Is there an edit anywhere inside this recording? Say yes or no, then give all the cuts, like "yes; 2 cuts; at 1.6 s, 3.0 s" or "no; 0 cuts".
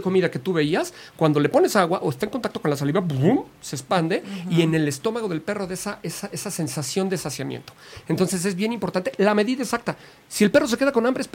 no; 0 cuts